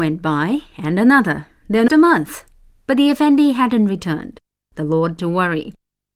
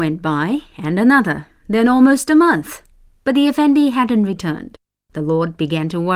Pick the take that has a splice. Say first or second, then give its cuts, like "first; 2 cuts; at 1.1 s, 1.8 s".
first; 2 cuts; at 1.9 s, 5.2 s